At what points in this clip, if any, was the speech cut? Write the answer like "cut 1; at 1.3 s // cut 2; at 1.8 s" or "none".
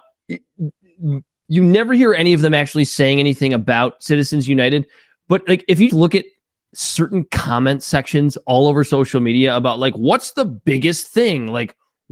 cut 1; at 5.9 s